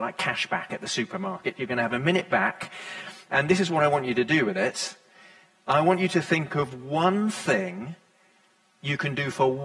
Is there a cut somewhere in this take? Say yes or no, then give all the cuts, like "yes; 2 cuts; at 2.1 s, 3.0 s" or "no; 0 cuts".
no; 0 cuts